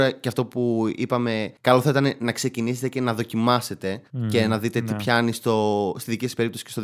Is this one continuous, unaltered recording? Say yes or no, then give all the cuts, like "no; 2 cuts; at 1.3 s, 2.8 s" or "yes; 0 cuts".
no; 2 cuts; at 1.6 s, 4.1 s